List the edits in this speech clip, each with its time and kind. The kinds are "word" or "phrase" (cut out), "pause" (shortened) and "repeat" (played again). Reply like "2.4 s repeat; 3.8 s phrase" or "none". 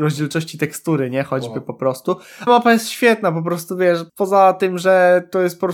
2.5 s word; 4.1 s word